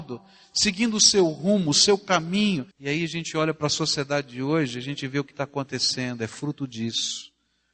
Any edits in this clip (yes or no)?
yes